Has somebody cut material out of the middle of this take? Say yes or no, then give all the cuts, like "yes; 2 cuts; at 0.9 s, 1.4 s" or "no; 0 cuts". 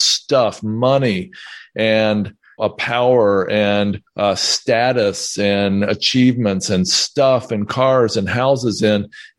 yes; 2 cuts; at 2.6 s, 4.1 s